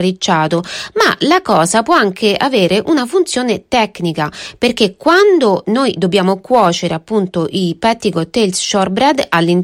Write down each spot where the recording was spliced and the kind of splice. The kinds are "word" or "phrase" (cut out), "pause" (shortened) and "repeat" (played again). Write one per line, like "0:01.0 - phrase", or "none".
none